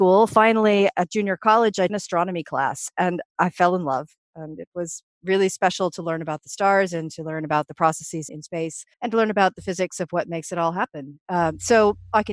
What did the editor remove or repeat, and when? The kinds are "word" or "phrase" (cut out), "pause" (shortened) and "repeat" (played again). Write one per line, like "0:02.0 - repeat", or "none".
0:01.9 - phrase
0:08.3 - word
0:08.9 - pause

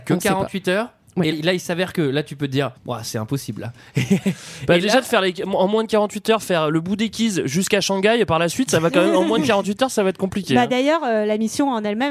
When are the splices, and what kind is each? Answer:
0:01.3 - word
0:02.8 - pause

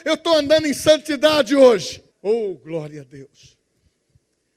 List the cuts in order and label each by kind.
0:02.1 - pause

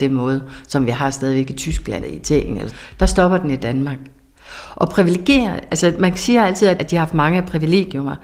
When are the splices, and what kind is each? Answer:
0:02.0 - word
0:02.7 - word
0:06.8 - phrase

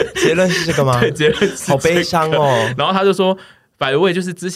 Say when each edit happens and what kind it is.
none

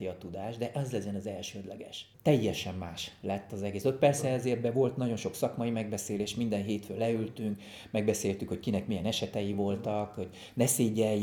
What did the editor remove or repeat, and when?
none

